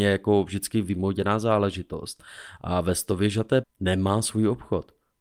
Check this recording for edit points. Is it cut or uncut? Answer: cut